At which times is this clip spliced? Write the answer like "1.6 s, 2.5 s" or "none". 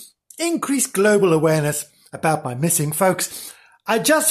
none